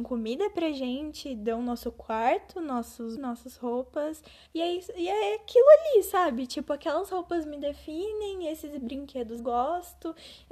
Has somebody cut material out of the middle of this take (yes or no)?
yes